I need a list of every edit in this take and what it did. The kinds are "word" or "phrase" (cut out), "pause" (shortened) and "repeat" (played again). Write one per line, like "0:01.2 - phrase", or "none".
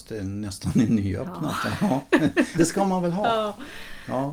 0:02.6 - word